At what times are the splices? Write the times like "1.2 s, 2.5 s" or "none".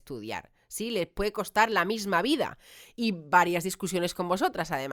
none